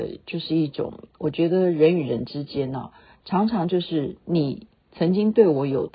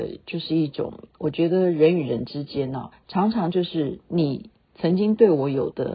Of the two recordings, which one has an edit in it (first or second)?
second